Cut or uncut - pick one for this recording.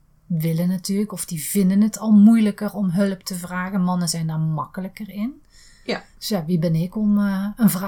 uncut